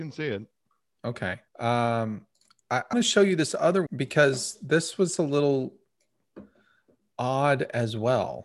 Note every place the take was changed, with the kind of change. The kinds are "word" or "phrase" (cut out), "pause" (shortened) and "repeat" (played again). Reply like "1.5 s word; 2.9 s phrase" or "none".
1.5 s pause; 2.9 s word; 3.9 s word